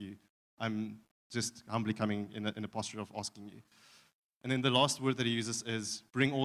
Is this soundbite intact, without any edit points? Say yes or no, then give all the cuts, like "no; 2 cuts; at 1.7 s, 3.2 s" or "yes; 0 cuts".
yes; 0 cuts